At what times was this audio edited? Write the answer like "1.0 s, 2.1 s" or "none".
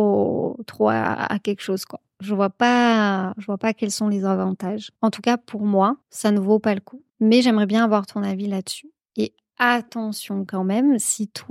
5.0 s, 6.0 s, 7.1 s